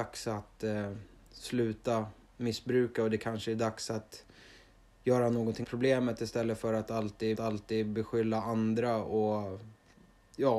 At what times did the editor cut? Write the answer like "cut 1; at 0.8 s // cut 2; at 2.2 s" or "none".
cut 1; at 2.2 s // cut 2; at 5.6 s // cut 3; at 7.3 s